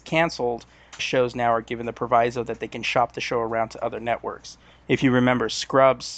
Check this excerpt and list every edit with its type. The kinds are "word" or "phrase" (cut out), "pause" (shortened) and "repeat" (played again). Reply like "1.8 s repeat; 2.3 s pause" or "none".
1.0 s phrase